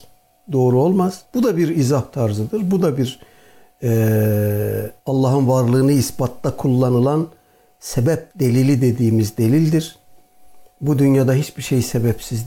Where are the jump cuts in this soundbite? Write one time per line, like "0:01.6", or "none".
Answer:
0:01.2
0:05.0
0:08.3